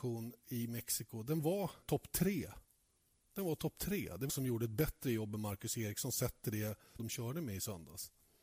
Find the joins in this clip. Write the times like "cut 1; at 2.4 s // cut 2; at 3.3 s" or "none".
cut 1; at 1.8 s // cut 2; at 4.3 s // cut 3; at 7.0 s